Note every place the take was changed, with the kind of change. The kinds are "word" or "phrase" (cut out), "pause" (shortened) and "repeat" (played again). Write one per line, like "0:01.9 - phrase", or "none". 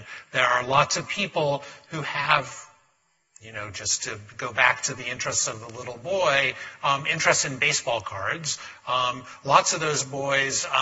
none